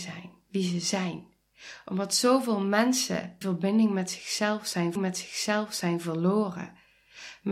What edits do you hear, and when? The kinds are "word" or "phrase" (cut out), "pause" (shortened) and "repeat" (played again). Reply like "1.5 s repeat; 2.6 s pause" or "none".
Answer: 3.4 s word; 5.0 s repeat